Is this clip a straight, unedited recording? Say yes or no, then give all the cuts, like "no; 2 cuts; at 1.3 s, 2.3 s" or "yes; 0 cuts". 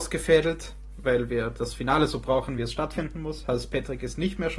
yes; 0 cuts